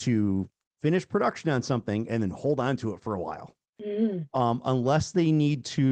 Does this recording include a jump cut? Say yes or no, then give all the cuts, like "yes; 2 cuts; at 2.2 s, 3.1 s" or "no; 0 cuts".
yes; 1 cut; at 3.7 s